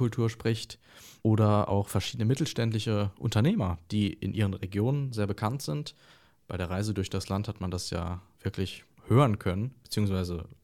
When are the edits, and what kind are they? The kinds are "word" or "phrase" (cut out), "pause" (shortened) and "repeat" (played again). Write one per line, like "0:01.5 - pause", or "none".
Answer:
none